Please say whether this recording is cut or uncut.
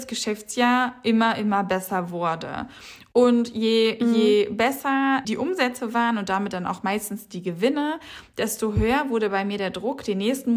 cut